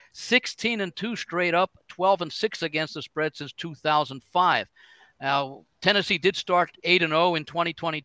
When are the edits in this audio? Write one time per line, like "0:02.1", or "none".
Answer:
none